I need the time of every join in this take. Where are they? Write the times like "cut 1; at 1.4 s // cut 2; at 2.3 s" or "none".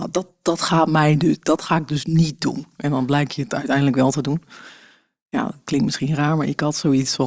none